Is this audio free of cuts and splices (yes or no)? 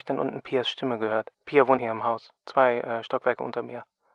no